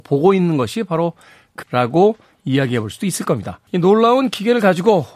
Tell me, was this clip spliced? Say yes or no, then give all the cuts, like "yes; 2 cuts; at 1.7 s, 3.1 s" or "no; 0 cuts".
yes; 2 cuts; at 1.6 s, 3.7 s